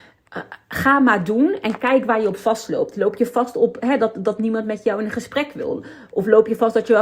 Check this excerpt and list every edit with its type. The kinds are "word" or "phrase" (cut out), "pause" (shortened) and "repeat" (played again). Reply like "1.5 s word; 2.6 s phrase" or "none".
none